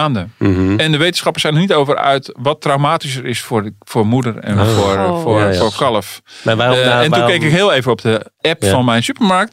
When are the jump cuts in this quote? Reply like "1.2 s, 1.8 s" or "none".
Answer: none

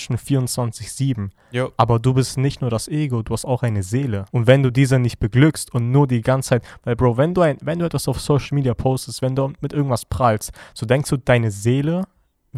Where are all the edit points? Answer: 4.3 s

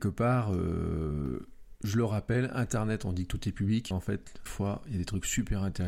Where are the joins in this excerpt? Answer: 3.9 s, 4.5 s

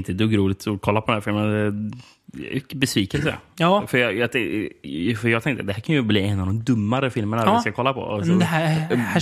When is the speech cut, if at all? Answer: none

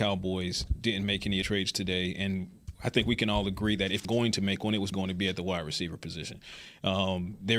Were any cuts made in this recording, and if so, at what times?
1.4 s, 4.0 s, 4.9 s

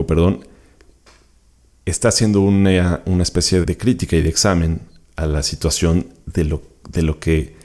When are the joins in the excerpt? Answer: 3.6 s

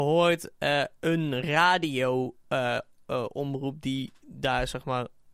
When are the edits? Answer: none

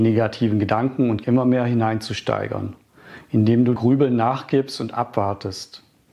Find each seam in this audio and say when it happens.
1.2 s, 3.8 s

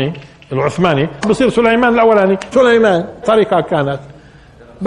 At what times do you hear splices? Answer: 1.2 s, 2.5 s, 3.2 s

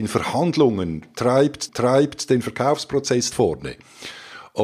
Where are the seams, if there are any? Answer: 1.7 s, 3.3 s

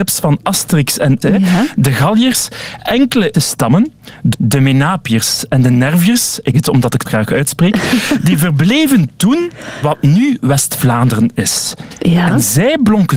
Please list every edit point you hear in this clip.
1.2 s, 3.3 s, 4.3 s, 6.5 s, 7.1 s, 9.8 s

